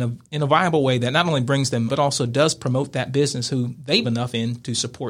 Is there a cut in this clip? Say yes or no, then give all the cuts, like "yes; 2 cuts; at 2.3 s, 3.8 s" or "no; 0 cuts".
yes; 2 cuts; at 1.9 s, 4.0 s